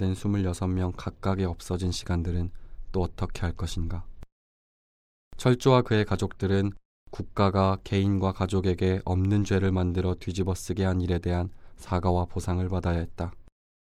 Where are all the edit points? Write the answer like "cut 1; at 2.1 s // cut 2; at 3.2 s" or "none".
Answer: none

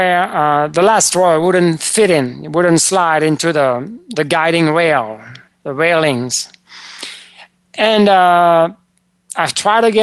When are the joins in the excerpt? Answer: cut 1; at 5.5 s

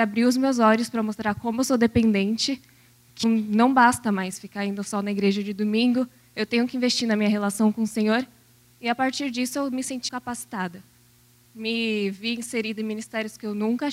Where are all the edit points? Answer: cut 1; at 3.2 s // cut 2; at 10.1 s

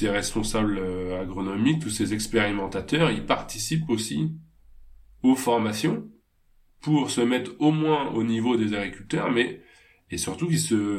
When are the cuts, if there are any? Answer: none

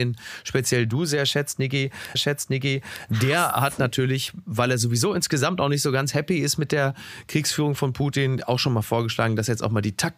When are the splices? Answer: cut 1; at 2.1 s

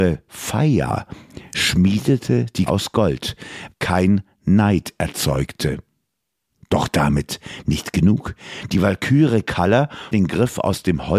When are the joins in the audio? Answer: cut 1; at 2.7 s // cut 2; at 3.7 s // cut 3; at 10.1 s

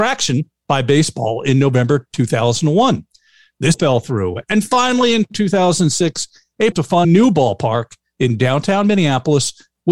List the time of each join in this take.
cut 1; at 3.7 s // cut 2; at 6.7 s // cut 3; at 7.0 s

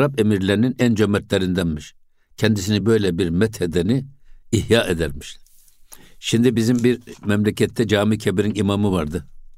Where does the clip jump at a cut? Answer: none

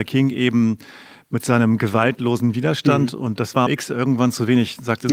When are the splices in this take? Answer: cut 1; at 3.7 s

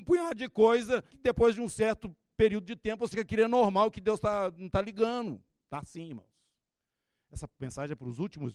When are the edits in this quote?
cut 1; at 1.1 s // cut 2; at 3.1 s

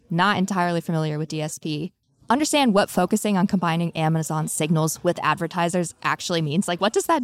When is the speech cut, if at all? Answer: none

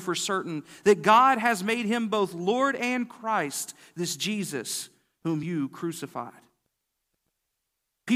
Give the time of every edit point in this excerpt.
none

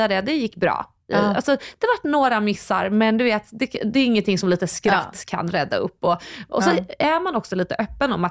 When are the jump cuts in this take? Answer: none

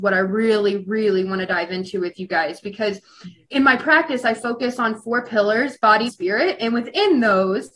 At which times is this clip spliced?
cut 1; at 6.1 s

